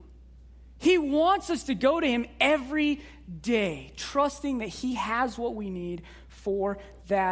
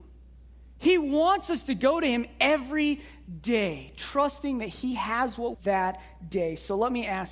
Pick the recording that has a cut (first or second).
second